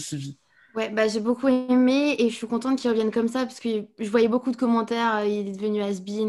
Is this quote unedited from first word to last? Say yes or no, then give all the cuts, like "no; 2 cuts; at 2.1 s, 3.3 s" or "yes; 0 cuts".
yes; 0 cuts